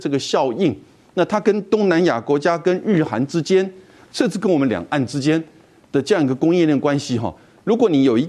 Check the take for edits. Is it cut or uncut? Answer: uncut